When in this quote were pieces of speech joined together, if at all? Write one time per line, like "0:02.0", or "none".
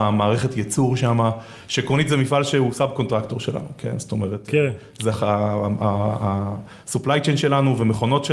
none